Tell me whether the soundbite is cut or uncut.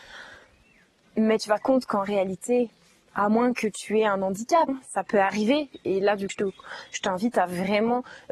cut